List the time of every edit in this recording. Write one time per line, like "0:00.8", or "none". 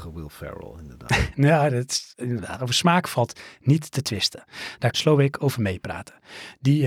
0:04.9